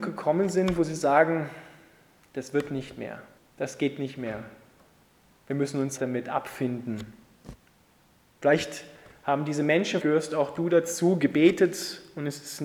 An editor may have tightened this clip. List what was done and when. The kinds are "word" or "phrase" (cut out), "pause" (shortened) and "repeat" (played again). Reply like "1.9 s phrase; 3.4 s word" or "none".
3.4 s pause; 6.0 s word; 10.0 s word